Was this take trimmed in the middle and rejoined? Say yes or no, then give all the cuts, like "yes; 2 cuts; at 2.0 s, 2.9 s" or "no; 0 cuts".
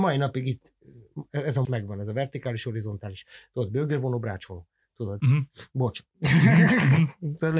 yes; 1 cut; at 1.6 s